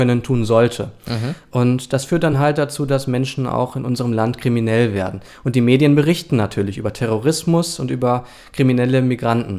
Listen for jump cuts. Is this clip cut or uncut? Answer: uncut